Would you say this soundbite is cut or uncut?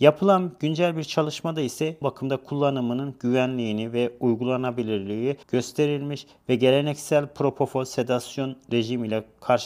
cut